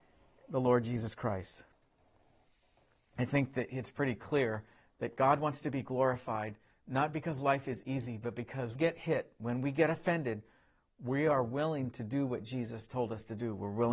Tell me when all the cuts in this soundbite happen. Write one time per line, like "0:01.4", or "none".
0:08.8